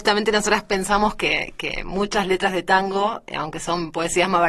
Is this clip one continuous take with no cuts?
yes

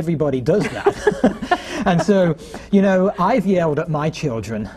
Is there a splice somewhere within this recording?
no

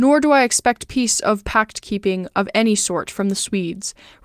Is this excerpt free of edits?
yes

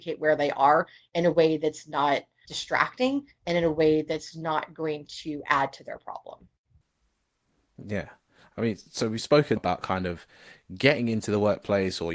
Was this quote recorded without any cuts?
no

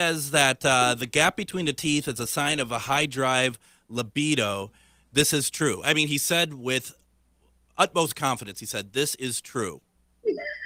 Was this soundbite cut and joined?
no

